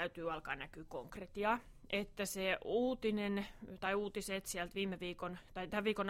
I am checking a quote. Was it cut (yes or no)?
no